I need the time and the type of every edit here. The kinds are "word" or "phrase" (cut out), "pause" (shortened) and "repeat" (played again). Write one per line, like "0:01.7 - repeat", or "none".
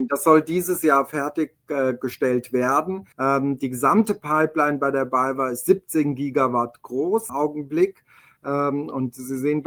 0:03.1 - pause
0:07.3 - word